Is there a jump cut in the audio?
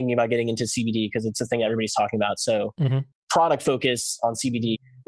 no; 0 cuts

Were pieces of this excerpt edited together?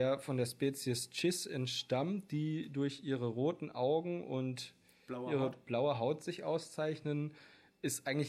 no; 0 cuts

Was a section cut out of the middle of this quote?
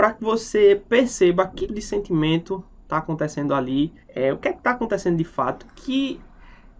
yes; 2 cuts; at 1.7 s, 4.0 s

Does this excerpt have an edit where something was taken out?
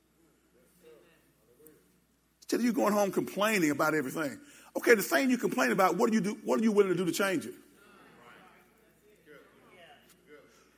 no; 0 cuts

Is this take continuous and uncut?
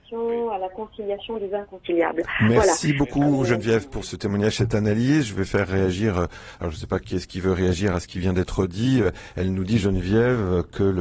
no; 1 cut; at 4.0 s

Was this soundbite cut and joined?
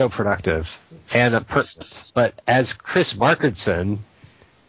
yes; 1 cut; at 2.1 s

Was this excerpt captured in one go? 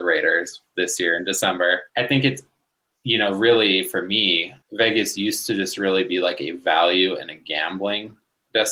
no; 2 cuts; at 1.9 s, 4.6 s

